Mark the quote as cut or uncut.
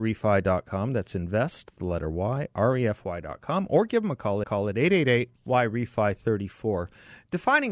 cut